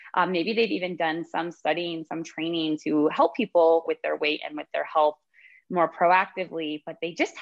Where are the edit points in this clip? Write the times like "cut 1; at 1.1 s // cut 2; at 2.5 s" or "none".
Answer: cut 1; at 3.9 s